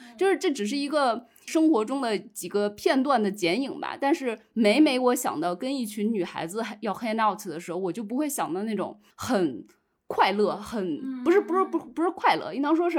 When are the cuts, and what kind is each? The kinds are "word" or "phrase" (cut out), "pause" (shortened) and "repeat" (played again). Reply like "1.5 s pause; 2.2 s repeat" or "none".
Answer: 9.1 s pause